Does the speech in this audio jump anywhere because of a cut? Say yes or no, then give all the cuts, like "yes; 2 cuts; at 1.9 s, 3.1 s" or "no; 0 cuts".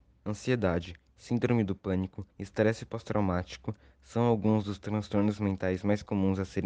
yes; 1 cut; at 2.3 s